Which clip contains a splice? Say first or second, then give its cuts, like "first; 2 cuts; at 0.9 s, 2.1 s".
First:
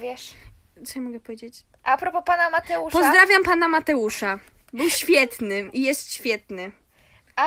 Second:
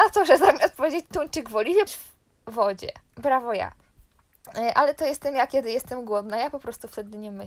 second; 2 cuts; at 1.9 s, 3.1 s